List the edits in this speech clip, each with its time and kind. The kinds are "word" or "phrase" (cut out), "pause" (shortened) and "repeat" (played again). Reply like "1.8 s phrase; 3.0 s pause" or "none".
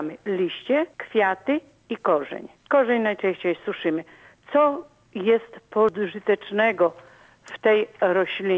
0.9 s pause; 2.6 s pause